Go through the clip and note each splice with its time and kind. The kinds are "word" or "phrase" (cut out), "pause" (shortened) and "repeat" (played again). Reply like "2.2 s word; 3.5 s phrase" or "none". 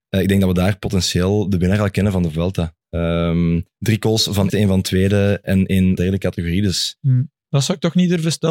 3.7 s pause; 4.5 s word; 5.4 s word; 6.0 s word; 7.4 s pause